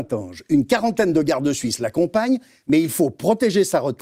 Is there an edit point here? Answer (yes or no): no